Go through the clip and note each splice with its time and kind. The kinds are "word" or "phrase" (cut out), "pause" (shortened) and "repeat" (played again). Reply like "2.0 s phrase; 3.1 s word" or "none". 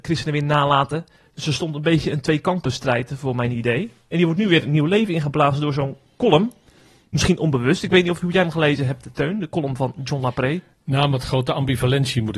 none